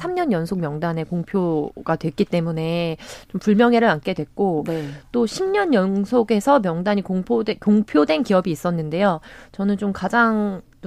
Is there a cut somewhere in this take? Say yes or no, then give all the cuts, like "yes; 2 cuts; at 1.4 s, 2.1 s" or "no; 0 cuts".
no; 0 cuts